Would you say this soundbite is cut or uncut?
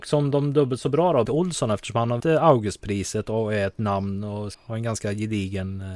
cut